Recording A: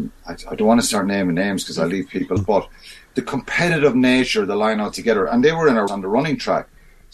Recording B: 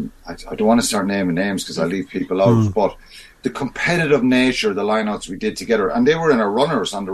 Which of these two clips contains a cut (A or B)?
A